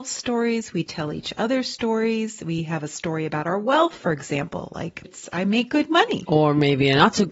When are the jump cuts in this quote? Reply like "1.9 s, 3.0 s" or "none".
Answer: 5.0 s